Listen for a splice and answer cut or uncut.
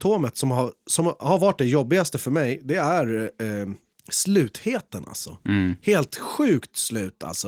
uncut